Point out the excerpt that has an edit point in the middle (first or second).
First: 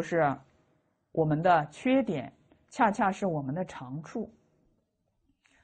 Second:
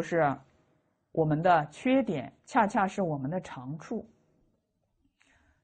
second